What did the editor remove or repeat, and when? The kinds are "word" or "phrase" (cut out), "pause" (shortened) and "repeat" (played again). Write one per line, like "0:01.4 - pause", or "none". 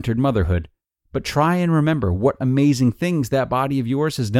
none